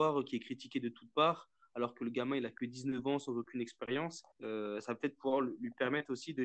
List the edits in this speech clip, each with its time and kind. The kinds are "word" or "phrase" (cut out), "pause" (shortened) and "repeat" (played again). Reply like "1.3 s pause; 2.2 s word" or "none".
4.3 s pause